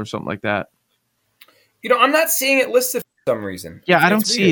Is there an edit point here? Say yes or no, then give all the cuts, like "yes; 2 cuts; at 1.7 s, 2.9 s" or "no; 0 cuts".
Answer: no; 0 cuts